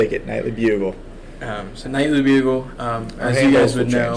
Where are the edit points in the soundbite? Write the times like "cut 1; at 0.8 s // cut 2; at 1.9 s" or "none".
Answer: cut 1; at 1.8 s